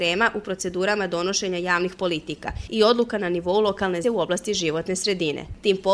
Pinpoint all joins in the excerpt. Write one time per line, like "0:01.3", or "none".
0:04.0